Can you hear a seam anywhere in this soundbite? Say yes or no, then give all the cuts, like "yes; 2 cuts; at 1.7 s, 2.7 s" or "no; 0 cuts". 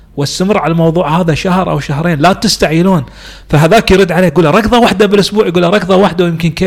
no; 0 cuts